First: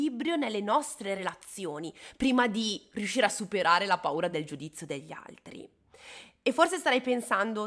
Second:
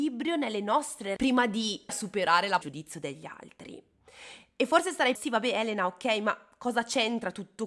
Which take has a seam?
second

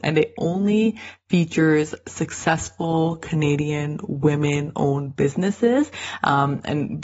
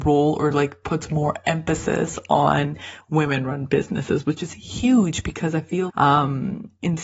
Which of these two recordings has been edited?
second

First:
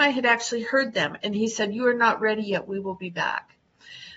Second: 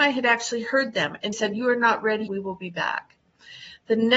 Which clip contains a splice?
second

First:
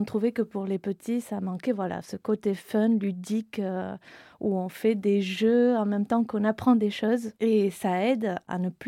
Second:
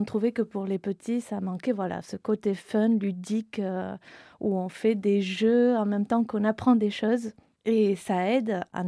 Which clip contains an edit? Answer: first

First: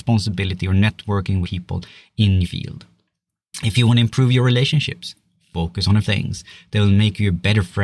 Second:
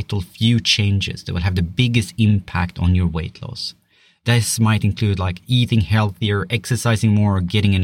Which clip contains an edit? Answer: first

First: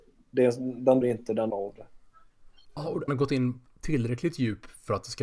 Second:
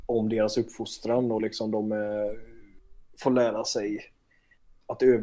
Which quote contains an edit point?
first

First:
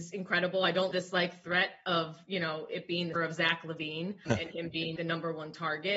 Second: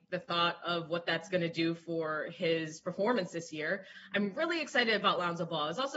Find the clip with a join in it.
first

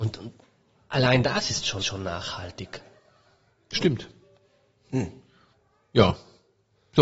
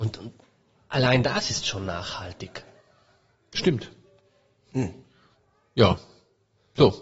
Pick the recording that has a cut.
first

